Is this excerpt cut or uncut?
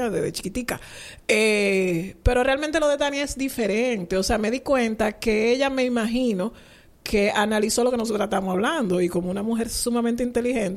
uncut